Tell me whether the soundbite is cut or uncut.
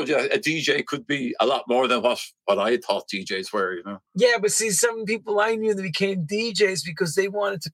cut